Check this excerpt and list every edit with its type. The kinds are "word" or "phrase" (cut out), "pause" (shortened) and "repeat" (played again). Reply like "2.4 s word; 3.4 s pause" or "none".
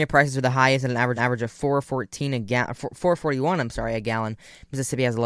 1.2 s repeat